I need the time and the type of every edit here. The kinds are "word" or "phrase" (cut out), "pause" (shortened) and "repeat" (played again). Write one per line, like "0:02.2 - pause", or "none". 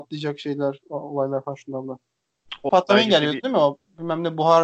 0:02.7 - word